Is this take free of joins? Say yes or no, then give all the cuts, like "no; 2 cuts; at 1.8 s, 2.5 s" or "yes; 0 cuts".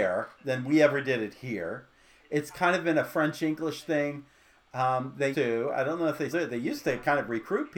no; 2 cuts; at 5.3 s, 6.3 s